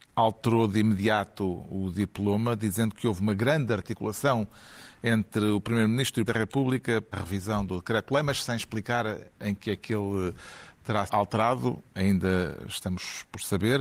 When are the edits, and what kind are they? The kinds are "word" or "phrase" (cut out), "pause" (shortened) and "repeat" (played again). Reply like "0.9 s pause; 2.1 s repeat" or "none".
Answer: 6.3 s word; 7.1 s phrase; 11.1 s word